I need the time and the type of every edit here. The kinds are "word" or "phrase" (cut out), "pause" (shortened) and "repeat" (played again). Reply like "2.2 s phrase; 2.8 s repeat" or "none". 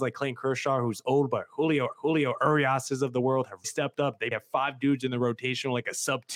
1.9 s repeat; 3.6 s word; 4.3 s word